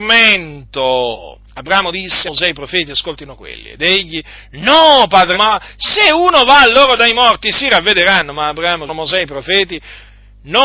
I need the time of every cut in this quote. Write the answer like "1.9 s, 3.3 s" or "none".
1.5 s, 2.3 s, 5.3 s, 8.9 s